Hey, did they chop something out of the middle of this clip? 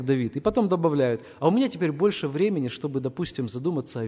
no; 0 cuts

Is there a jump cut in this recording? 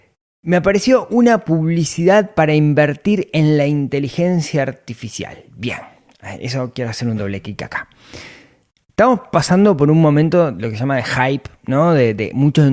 no; 0 cuts

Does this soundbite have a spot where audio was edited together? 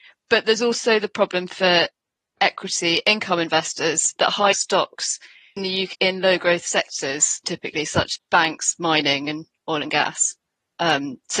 yes; 6 cuts; at 4.2 s, 4.5 s, 5.6 s, 5.9 s, 7.4 s, 8.2 s

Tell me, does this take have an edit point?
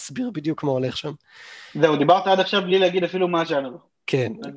no; 0 cuts

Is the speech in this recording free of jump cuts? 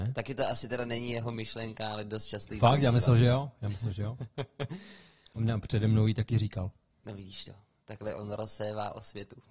yes; 0 cuts

